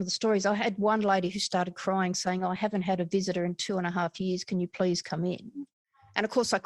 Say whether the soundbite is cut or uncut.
uncut